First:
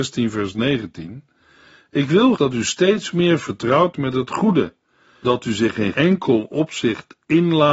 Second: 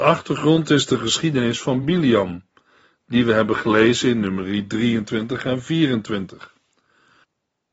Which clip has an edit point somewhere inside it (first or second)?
first